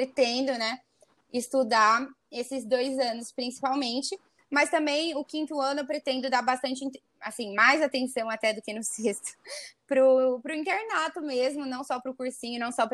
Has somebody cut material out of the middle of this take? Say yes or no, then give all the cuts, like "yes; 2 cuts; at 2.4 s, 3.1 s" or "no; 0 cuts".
no; 0 cuts